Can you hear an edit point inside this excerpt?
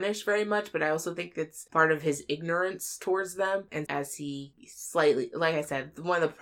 yes; 1 cut; at 3.9 s

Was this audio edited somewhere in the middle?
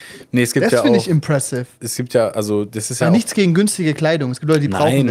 no; 0 cuts

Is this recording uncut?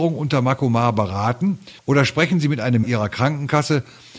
no; 2 cuts; at 1.8 s, 2.8 s

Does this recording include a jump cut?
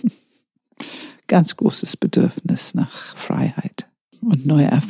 yes; 1 cut; at 4.0 s

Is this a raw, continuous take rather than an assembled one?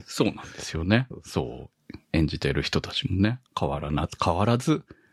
no; 1 cut; at 3.5 s

